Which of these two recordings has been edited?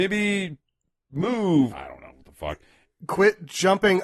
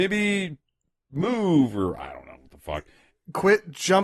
first; 1 cut; at 1.7 s

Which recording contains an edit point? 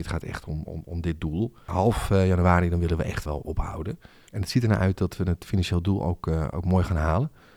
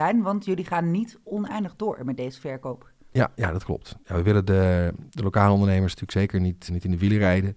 second; 1 cut; at 6.7 s

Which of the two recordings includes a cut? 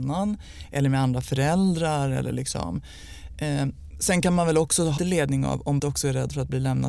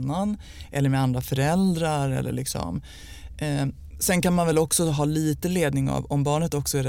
first; 2 cuts; at 5.0 s, 5.8 s

